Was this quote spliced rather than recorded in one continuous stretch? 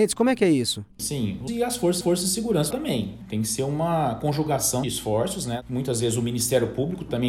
yes; 4 cuts; at 1.5 s, 2.0 s, 2.7 s, 4.8 s

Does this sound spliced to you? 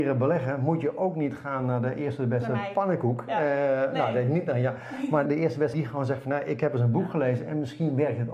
yes; 2 cuts; at 5.3 s, 5.7 s

